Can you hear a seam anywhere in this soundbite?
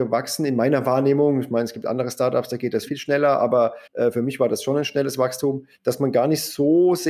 yes; 3 cuts; at 2.9 s, 3.9 s, 5.7 s

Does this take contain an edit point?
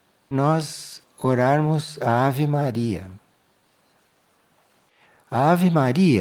no; 0 cuts

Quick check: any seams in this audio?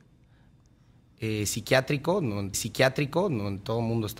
yes; 1 cut; at 2.5 s

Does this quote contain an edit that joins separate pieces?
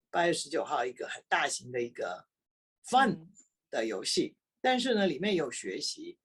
no; 0 cuts

